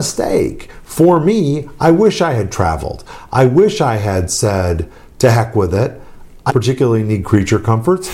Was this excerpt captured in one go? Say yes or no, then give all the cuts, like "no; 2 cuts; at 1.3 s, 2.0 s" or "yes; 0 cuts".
no; 1 cut; at 6.5 s